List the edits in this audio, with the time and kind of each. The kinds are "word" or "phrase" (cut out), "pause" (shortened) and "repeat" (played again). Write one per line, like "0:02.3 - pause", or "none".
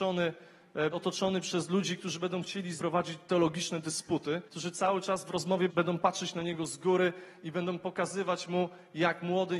0:00.9 - word
0:02.8 - word
0:04.5 - pause
0:05.7 - word